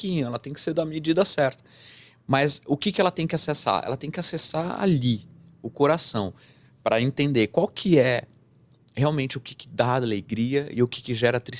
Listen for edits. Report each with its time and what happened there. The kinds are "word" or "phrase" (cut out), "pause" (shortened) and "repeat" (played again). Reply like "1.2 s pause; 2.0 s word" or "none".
none